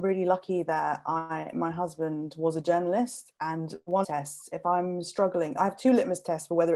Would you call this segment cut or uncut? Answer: cut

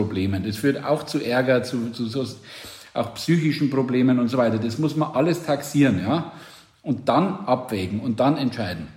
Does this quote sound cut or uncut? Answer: uncut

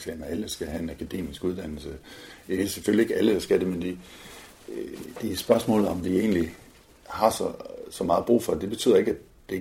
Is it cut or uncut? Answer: uncut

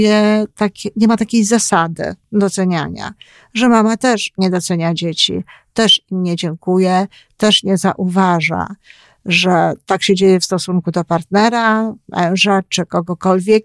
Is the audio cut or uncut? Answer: uncut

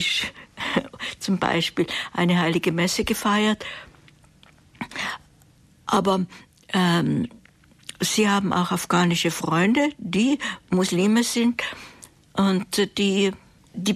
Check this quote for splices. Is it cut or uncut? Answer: uncut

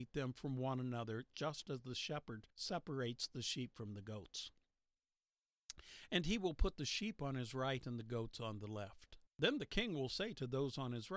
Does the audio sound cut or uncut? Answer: cut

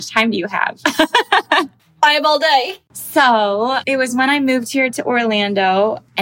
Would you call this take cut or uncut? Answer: uncut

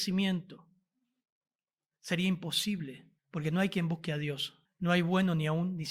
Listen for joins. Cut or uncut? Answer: cut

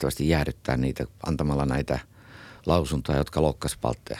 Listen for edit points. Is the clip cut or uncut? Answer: uncut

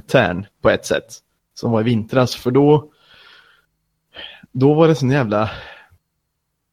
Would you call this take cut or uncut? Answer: uncut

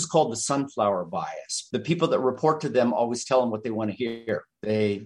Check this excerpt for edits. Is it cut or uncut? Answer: uncut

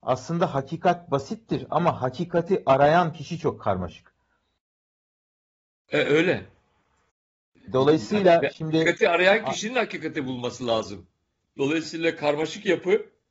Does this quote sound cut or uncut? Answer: uncut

